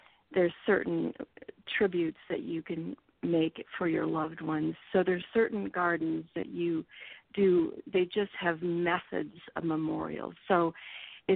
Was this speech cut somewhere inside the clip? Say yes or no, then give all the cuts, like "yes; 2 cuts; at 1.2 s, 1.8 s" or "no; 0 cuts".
no; 0 cuts